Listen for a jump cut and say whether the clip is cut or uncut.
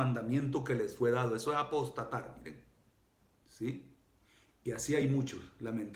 uncut